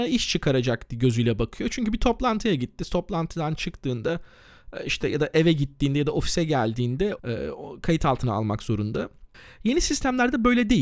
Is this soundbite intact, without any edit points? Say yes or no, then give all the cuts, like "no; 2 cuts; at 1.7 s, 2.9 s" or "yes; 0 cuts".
yes; 0 cuts